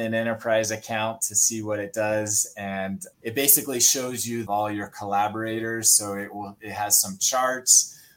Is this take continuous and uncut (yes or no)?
no